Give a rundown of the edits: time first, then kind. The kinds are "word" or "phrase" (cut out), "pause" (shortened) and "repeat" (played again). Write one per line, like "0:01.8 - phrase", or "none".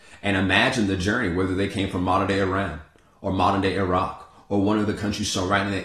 none